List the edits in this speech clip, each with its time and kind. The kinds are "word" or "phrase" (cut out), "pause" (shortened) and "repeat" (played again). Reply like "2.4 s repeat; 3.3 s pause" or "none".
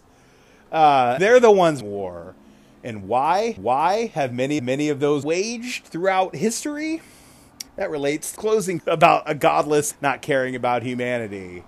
1.2 s word; 1.8 s word; 3.6 s repeat; 4.6 s repeat; 5.2 s phrase; 7.7 s pause; 8.4 s word; 8.8 s word; 9.9 s word

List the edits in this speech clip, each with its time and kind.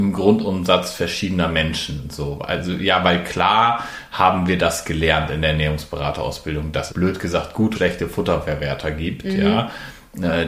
6.9 s word; 7.7 s word

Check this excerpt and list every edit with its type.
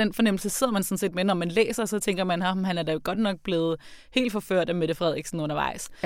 none

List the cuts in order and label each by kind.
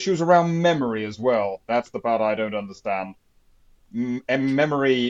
none

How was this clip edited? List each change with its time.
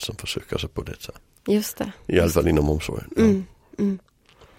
none

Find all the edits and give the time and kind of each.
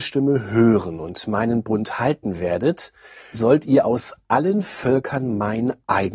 3.3 s word

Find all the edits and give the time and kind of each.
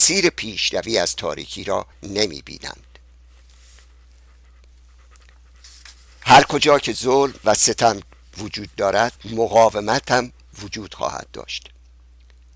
1.9 s pause; 9.2 s pause

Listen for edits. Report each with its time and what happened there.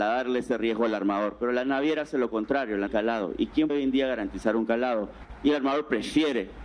2.9 s phrase; 3.7 s word

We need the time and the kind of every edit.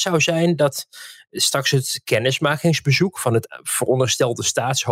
none

